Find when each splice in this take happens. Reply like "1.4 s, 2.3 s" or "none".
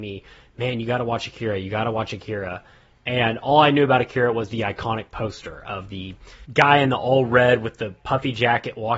none